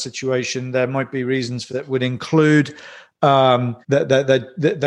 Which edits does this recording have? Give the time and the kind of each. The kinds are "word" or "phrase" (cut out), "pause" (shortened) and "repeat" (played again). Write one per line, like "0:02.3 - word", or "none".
0:01.7 - word
0:03.8 - pause